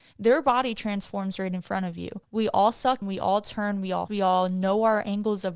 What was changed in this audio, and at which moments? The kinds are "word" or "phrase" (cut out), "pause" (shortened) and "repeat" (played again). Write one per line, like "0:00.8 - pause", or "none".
0:02.2 - pause
0:03.0 - word
0:04.1 - word